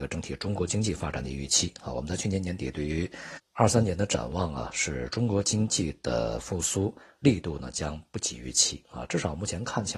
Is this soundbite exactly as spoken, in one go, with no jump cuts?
yes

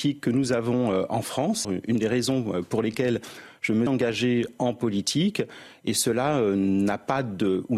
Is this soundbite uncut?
no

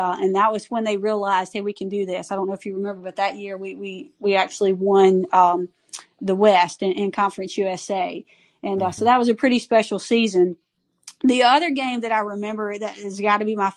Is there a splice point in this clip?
no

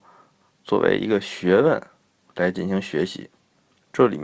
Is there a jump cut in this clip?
no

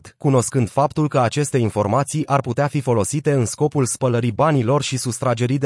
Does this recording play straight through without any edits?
yes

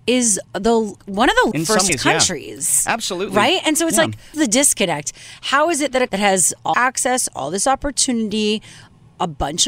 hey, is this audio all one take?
no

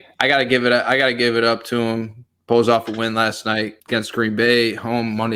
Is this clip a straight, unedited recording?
no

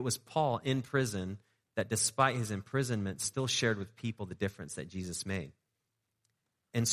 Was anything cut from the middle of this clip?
no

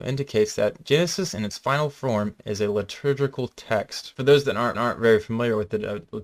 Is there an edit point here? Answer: yes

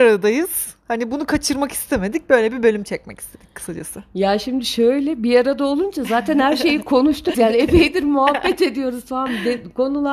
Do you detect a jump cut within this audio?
yes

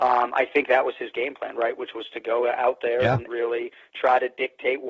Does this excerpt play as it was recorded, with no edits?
no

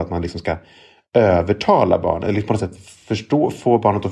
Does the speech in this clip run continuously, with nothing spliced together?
yes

